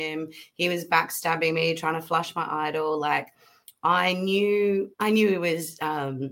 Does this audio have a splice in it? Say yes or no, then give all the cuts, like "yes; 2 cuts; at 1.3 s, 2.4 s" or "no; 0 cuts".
yes; 1 cut; at 4.9 s